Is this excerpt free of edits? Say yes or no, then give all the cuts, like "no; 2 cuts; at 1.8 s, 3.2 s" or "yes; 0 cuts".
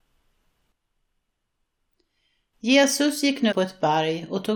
no; 1 cut; at 3.5 s